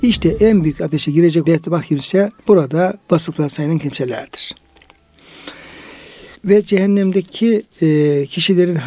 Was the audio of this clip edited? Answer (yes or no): yes